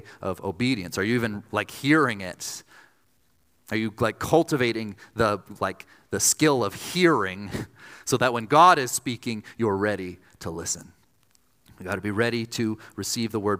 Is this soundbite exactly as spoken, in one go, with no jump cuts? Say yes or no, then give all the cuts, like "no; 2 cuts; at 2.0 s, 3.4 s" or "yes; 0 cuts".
yes; 0 cuts